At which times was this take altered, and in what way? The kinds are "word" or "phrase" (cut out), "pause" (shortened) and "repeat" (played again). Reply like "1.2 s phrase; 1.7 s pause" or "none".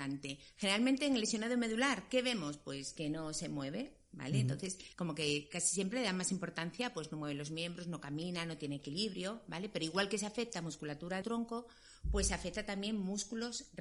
4.9 s pause; 11.2 s phrase

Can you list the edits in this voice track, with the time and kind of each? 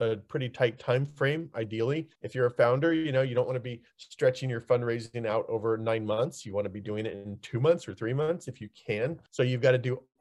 2.2 s pause; 9.3 s pause

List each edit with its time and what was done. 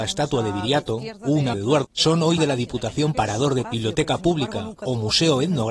1.5 s word; 1.8 s word; 2.4 s word; 3.1 s word; 3.6 s word

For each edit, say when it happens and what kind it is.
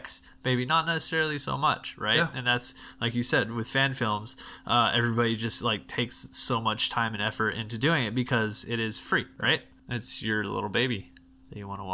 none

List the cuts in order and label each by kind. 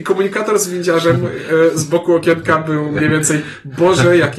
none

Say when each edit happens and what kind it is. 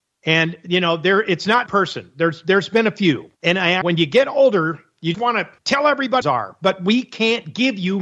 1.7 s phrase; 3.3 s pause; 3.8 s word; 5.1 s word; 5.6 s pause; 6.2 s phrase

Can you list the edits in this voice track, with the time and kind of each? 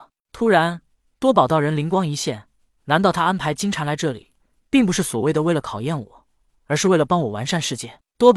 none

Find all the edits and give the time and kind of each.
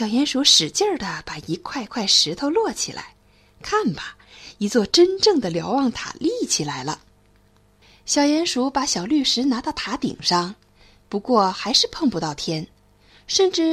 none

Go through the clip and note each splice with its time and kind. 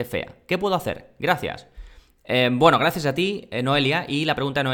none

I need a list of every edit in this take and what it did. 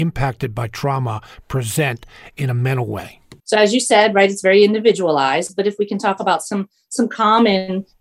3.4 s pause

